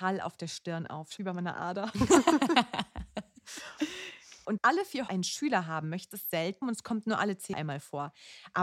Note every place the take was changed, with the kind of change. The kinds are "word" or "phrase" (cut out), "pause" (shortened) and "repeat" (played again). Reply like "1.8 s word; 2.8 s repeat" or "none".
1.2 s word; 4.6 s word; 5.1 s word; 6.1 s word; 6.6 s word; 7.5 s word